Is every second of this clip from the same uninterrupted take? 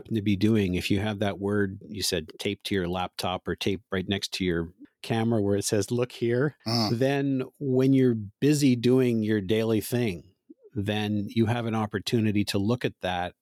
no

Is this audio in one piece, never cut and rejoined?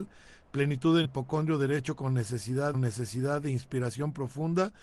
no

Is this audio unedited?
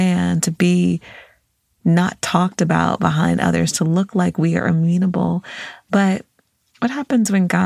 yes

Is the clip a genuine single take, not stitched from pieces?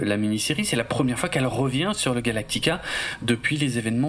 yes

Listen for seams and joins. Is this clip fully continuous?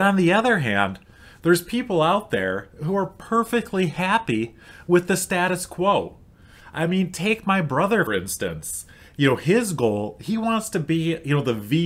no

